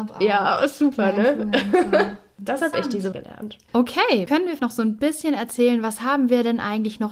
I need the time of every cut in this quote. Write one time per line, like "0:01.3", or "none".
0:03.1
0:04.3
0:04.6